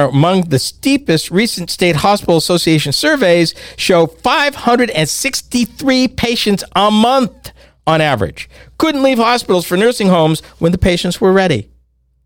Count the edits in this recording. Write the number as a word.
zero